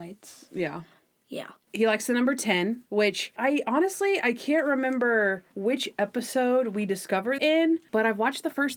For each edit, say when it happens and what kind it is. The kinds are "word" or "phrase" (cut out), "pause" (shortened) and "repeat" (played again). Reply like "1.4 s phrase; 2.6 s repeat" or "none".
3.4 s word; 7.4 s word